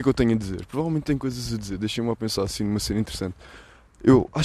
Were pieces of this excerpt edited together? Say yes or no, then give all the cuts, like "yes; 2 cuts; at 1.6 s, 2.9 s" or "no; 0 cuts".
no; 0 cuts